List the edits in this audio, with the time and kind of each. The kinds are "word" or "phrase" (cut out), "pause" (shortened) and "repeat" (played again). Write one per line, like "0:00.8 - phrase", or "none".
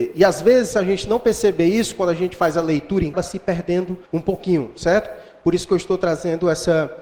0:03.1 - phrase
0:04.1 - pause